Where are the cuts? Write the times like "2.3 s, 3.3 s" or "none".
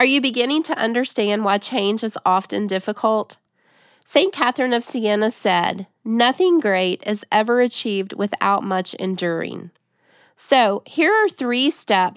none